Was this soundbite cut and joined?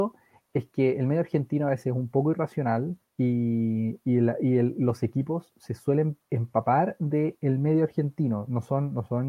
yes; 2 cuts; at 3.0 s, 6.2 s

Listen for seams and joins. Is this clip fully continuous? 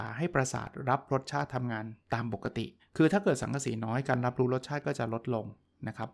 no; 2 cuts; at 2.0 s, 2.8 s

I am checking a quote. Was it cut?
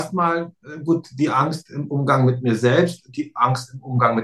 no; 0 cuts

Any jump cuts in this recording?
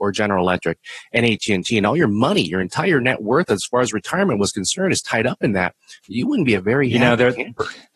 yes; 1 cut; at 6.0 s

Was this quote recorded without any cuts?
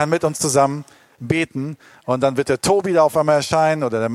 yes; 0 cuts

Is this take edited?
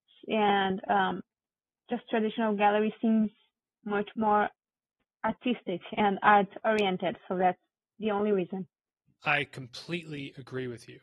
no; 0 cuts

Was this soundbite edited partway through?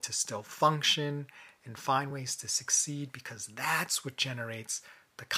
no; 0 cuts

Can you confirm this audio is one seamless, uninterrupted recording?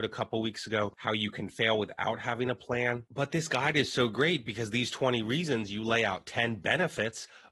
yes; 0 cuts

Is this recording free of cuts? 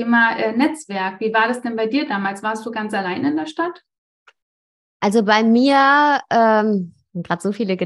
yes; 0 cuts

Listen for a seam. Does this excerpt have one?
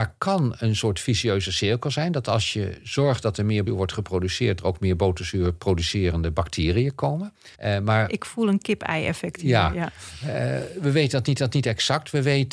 yes; 4 cuts; at 3.7 s, 4.6 s, 7.5 s, 11.4 s

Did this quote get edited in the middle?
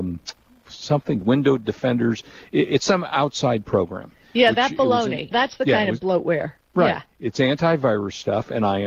yes; 2 cuts; at 1.2 s, 5.3 s

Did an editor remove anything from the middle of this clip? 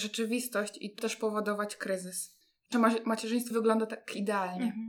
yes; 3 cuts; at 1.0 s, 2.7 s, 3.5 s

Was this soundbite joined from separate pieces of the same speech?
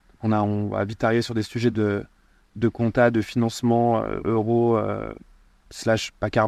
no; 0 cuts

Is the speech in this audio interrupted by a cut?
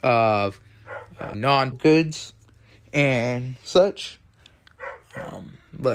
yes; 2 cuts; at 1.3 s, 1.7 s

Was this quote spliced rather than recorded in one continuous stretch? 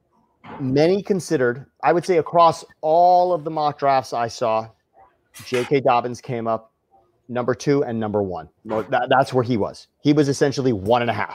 yes; 1 cut; at 8.6 s

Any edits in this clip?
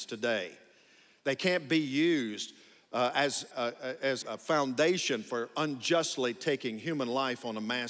yes; 2 cuts; at 3.5 s, 4.2 s

